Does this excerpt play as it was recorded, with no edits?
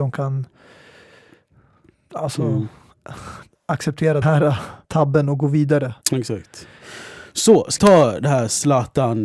no; 4 cuts; at 4.2 s, 4.8 s, 6.0 s, 7.8 s

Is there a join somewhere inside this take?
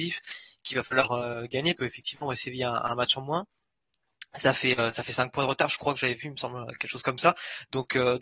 yes; 1 cut; at 1.8 s

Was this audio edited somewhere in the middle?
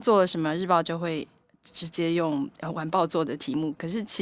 no; 0 cuts

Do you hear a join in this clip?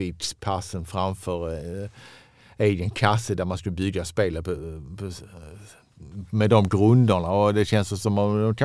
no; 0 cuts

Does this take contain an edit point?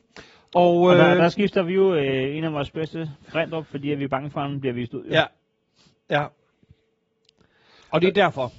no; 0 cuts

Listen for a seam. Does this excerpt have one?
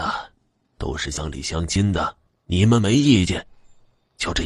yes; 1 cut; at 2.3 s

